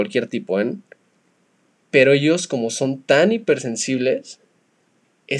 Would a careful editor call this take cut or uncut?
uncut